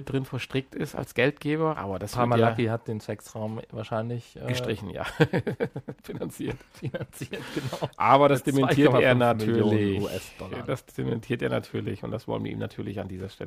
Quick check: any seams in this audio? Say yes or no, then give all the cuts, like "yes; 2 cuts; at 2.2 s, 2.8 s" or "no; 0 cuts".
no; 0 cuts